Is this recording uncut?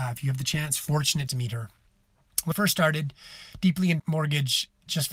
no; 3 cuts; at 1.3 s, 2.5 s, 4.0 s

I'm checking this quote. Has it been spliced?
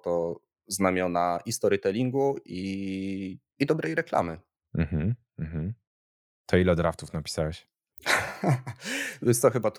no; 0 cuts

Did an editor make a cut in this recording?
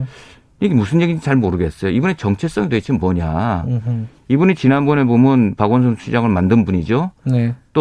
no; 0 cuts

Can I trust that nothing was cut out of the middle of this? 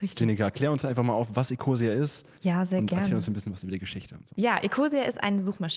yes; 0 cuts

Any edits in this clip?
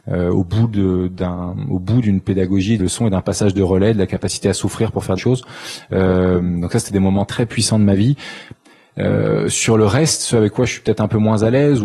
yes; 3 cuts; at 2.8 s, 5.2 s, 7.3 s

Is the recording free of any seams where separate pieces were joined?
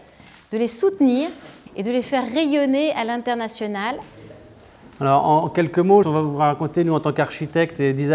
no; 2 cuts; at 1.7 s, 6.0 s

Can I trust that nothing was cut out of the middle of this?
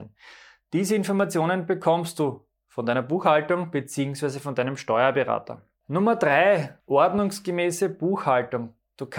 no; 1 cut; at 6.8 s

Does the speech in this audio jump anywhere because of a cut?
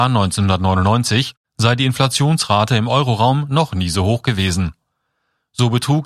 no; 0 cuts

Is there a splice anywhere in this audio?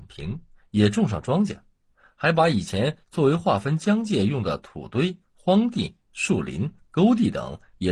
no; 0 cuts

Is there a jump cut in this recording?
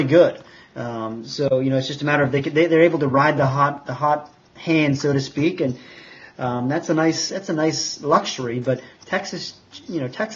no; 0 cuts

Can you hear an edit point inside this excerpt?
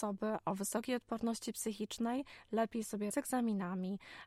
yes; 1 cut; at 3.1 s

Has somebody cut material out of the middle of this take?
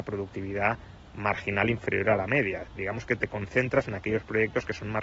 no; 0 cuts

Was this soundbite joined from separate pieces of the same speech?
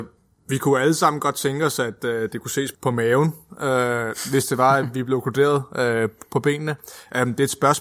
no; 0 cuts

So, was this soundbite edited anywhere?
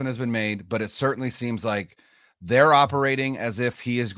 no; 0 cuts

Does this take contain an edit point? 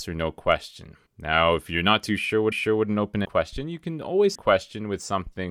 yes; 4 cuts; at 1.1 s, 2.5 s, 3.2 s, 4.3 s

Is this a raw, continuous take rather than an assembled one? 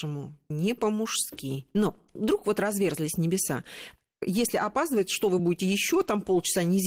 yes; 0 cuts

